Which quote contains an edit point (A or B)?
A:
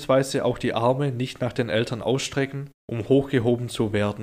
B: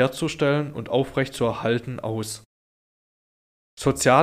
A